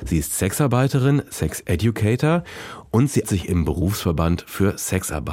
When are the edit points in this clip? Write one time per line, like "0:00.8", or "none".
0:03.2